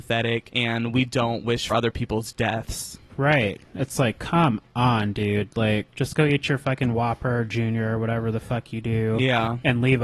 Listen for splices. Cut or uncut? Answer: cut